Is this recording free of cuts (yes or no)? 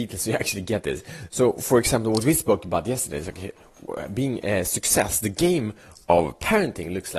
yes